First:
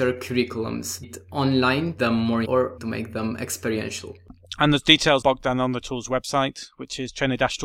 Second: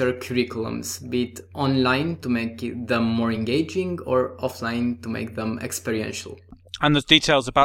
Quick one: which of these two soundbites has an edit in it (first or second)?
first